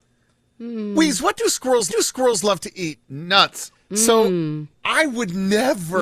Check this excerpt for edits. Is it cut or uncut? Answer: cut